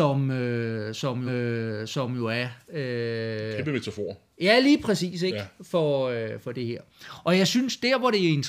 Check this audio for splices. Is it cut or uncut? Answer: cut